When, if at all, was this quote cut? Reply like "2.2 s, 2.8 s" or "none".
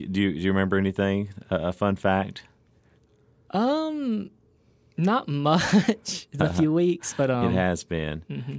6.4 s